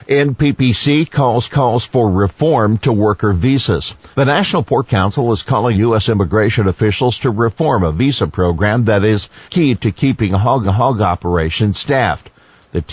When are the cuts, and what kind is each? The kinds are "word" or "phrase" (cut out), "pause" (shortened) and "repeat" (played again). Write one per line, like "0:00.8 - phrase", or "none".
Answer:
0:01.5 - repeat
0:04.1 - pause
0:04.9 - word
0:05.7 - word
0:09.5 - pause
0:10.6 - repeat